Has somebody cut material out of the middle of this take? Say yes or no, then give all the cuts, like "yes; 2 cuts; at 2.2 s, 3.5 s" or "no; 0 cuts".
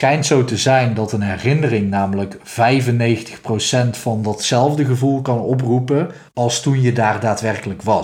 yes; 1 cut; at 6.3 s